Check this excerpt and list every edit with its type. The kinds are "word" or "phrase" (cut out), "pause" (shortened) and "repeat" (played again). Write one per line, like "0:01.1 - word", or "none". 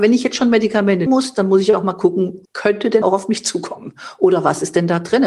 0:01.1 - word
0:02.5 - word
0:03.0 - word